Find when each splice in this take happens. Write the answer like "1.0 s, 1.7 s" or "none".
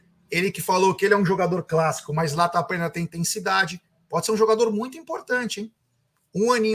none